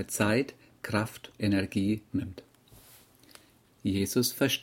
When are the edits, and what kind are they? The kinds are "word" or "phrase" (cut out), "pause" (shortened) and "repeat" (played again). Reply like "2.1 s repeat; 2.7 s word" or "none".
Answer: 1.4 s word; 2.1 s phrase